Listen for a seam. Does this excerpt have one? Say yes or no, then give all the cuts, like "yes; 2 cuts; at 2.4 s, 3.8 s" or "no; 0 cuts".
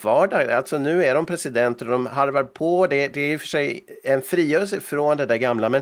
no; 0 cuts